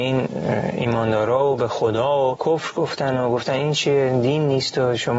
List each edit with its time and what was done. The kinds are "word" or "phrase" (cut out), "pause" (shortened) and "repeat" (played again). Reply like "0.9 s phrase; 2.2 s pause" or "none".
2.4 s word